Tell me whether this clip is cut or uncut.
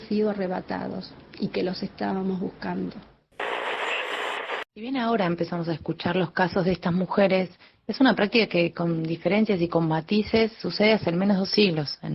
uncut